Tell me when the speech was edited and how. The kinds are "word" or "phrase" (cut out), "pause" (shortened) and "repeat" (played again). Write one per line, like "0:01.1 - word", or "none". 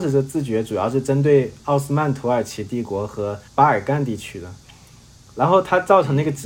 0:03.5 - pause